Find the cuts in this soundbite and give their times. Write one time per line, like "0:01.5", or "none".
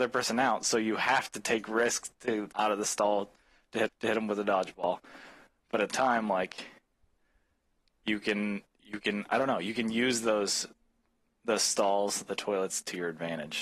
0:02.5
0:03.9
0:05.9